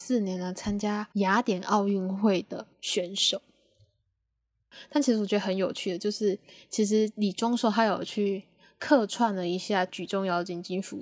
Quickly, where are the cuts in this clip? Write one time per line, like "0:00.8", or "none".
0:01.1
0:02.7